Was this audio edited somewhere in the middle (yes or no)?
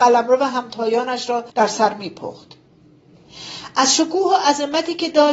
yes